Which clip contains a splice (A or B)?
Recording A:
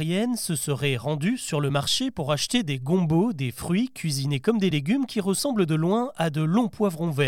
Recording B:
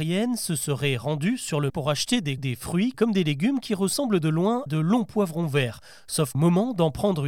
B